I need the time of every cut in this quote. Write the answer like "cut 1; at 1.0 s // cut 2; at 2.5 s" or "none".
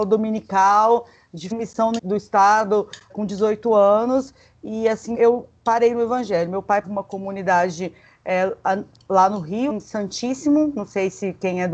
cut 1; at 1.5 s // cut 2; at 2.0 s // cut 3; at 3.1 s // cut 4; at 5.1 s // cut 5; at 6.8 s // cut 6; at 9.7 s